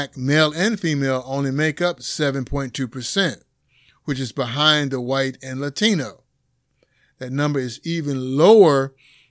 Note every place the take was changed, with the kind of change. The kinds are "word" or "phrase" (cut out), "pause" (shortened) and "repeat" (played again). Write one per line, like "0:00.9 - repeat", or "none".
none